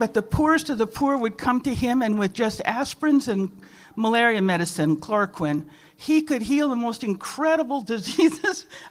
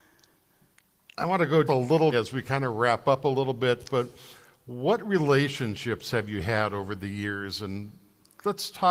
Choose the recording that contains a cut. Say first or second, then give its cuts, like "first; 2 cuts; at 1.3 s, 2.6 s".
second; 2 cuts; at 1.7 s, 2.1 s